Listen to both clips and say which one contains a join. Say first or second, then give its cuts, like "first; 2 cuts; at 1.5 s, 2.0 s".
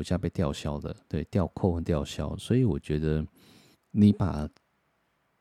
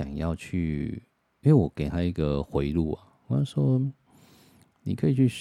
first; 2 cuts; at 1.0 s, 3.7 s